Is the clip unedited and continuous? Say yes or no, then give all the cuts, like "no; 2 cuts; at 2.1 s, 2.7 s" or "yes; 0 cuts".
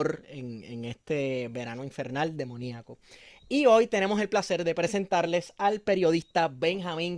yes; 0 cuts